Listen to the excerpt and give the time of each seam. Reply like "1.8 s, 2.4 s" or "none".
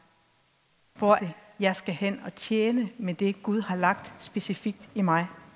1.2 s